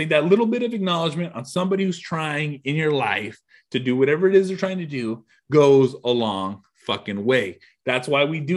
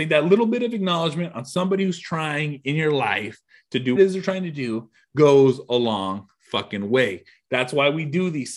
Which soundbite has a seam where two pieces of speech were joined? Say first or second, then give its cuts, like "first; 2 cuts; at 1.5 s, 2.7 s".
second; 1 cut; at 4.0 s